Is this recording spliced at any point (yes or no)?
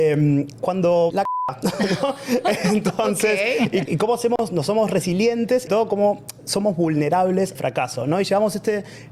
yes